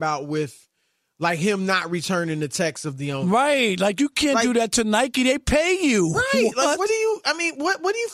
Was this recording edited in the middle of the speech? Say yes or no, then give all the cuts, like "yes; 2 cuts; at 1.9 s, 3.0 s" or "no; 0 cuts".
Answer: no; 0 cuts